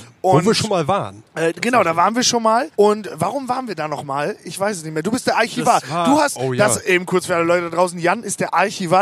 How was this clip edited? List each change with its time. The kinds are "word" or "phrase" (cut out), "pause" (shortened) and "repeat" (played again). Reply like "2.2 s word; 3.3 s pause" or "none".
1.3 s pause; 2.7 s pause